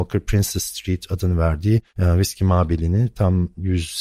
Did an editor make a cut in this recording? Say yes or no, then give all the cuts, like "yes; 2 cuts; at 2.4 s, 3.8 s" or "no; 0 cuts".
yes; 1 cut; at 1.9 s